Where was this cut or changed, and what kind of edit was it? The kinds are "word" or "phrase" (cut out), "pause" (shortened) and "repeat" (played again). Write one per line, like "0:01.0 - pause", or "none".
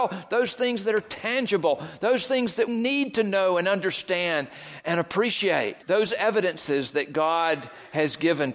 0:02.7 - word
0:05.8 - pause